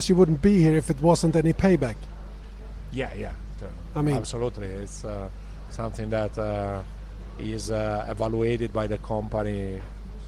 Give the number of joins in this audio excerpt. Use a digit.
0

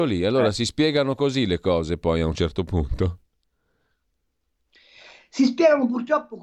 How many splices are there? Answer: 0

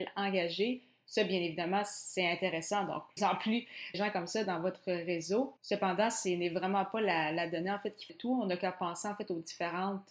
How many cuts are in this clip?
4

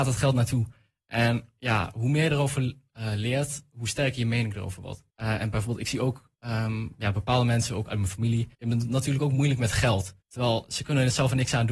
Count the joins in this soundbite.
4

